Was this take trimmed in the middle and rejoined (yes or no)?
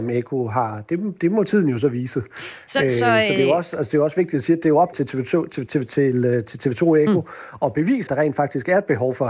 yes